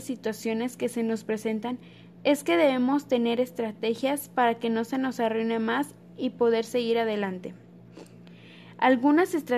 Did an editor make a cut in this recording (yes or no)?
no